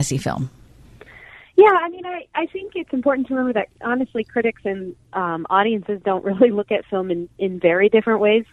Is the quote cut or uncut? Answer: uncut